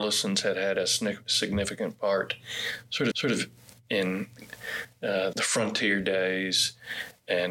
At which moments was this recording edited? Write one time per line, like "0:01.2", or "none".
0:03.1
0:05.3